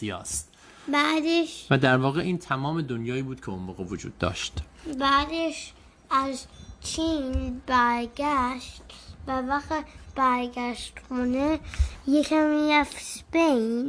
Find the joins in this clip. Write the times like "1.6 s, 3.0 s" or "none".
none